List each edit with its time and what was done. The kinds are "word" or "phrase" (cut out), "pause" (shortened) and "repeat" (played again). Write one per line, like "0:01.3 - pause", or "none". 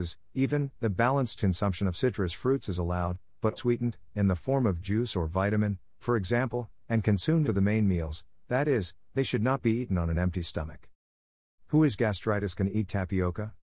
0:01.9 - word
0:03.6 - word
0:07.4 - word